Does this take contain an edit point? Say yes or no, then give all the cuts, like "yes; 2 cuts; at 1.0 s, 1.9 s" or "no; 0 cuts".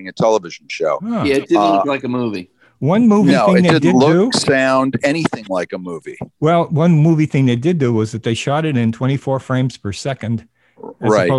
no; 0 cuts